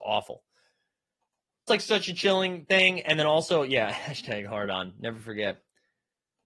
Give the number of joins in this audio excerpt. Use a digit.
1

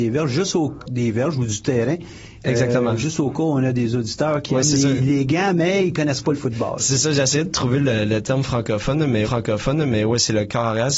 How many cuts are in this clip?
1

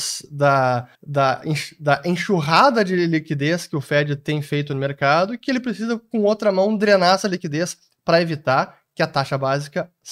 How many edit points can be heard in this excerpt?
1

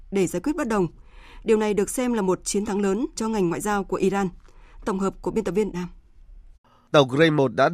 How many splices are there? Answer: 3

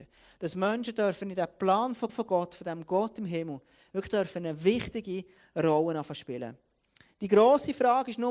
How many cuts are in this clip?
1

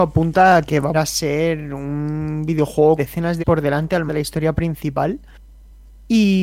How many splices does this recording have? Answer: 4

